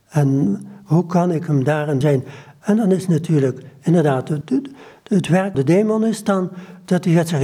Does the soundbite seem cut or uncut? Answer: cut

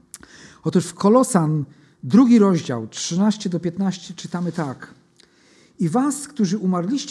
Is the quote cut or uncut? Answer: uncut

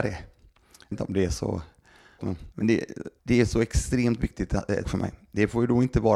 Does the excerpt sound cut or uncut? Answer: cut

